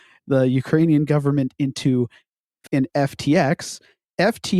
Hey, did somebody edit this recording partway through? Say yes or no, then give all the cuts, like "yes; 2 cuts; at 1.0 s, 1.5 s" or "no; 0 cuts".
yes; 1 cut; at 2.7 s